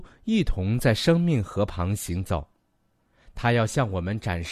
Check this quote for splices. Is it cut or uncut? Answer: uncut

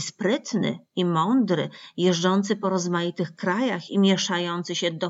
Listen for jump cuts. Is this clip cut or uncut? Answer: uncut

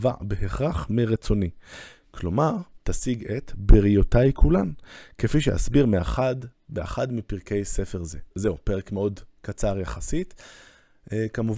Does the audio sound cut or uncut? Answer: cut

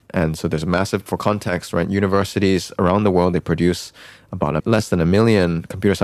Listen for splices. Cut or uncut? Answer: cut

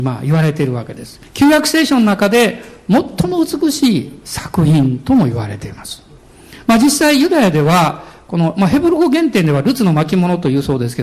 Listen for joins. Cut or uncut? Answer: cut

